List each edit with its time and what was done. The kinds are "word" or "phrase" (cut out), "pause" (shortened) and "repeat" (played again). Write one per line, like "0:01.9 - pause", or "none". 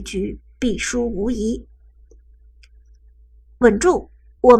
none